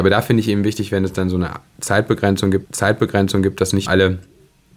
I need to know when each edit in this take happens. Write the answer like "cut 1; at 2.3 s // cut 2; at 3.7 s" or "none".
cut 1; at 2.6 s // cut 2; at 3.9 s